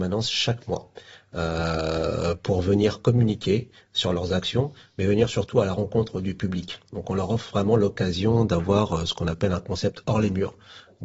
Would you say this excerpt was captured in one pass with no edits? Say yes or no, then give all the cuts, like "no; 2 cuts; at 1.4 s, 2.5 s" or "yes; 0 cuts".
yes; 0 cuts